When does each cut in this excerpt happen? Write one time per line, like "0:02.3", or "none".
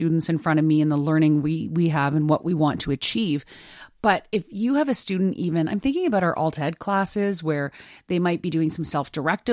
none